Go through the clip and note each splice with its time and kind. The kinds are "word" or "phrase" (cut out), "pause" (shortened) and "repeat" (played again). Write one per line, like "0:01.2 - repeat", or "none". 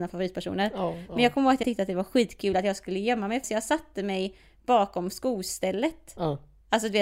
0:01.6 - word
0:03.4 - word